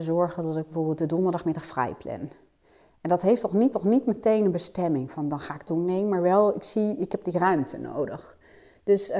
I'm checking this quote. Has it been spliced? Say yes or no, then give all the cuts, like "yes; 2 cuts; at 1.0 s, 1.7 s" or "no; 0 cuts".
yes; 2 cuts; at 3.7 s, 5.7 s